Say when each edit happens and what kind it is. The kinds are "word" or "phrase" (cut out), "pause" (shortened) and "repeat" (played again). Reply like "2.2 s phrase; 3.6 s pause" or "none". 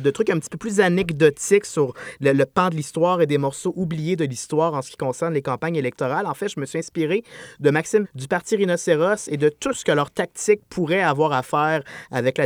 8.0 s word